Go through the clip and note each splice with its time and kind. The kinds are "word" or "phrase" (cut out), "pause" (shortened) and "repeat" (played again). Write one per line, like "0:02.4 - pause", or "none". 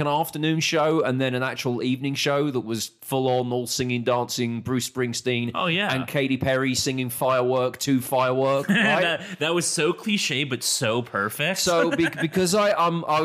none